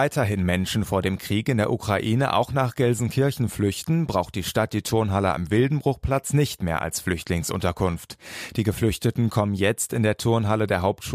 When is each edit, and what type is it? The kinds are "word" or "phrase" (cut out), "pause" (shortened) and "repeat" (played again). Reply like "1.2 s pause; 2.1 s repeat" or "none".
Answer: none